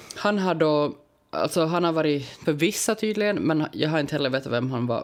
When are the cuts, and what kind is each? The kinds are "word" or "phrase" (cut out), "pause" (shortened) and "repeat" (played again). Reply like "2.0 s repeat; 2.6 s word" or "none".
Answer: 2.4 s phrase